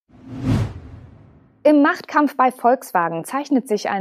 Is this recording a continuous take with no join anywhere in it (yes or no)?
yes